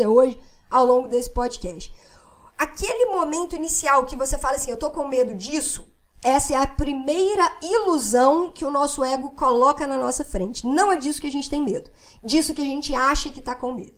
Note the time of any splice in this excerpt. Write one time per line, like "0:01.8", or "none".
none